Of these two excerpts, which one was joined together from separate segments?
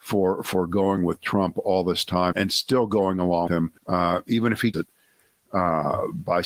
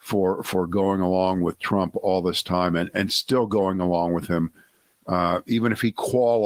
first; 5 cuts; at 1.0 s, 2.3 s, 3.5 s, 3.8 s, 4.7 s

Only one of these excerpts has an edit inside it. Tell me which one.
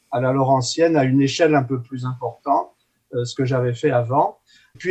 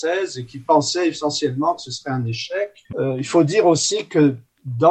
second; 1 cut; at 2.8 s

